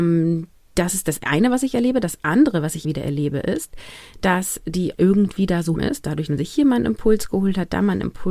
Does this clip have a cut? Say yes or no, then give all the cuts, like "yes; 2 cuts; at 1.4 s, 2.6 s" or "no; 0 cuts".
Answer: yes; 4 cuts; at 2.8 s, 4.9 s, 5.8 s, 6.3 s